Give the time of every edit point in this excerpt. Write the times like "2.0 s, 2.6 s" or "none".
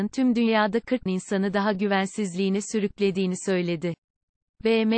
1.1 s, 1.7 s